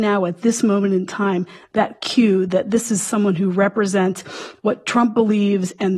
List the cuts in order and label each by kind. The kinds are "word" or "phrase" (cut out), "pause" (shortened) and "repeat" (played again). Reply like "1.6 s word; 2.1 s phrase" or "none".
none